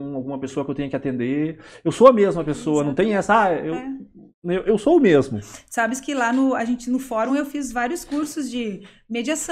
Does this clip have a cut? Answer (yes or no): no